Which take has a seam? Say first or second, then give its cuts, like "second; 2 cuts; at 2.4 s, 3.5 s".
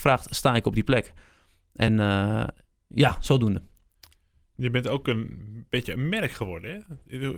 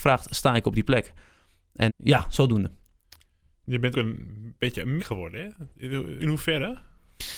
second; 4 cuts; at 1.9 s, 3.9 s, 5.0 s, 6.2 s